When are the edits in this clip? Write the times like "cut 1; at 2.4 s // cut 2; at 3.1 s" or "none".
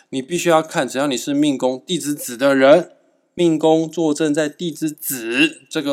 none